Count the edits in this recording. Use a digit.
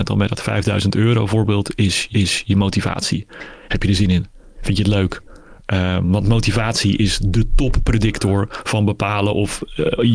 1